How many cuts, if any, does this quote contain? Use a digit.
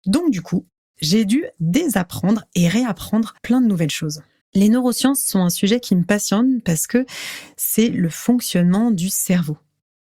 2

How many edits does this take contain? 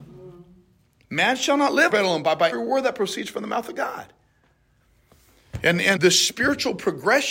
3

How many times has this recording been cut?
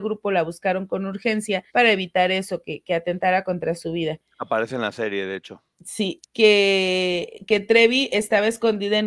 2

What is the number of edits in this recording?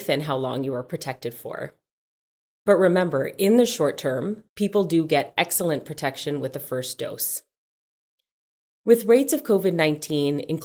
1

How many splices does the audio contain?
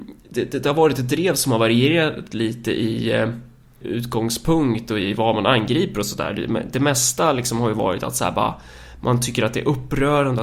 1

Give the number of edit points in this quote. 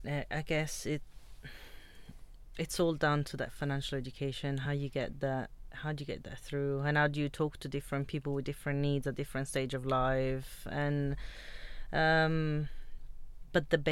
0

